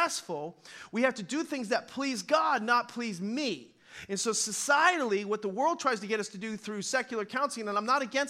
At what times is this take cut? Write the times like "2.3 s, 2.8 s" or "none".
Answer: none